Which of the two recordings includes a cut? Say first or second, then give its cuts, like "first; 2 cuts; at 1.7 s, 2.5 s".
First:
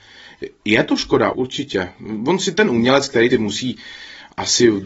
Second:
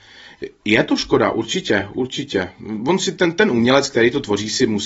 first; 3 cuts; at 1.3 s, 2.5 s, 3.3 s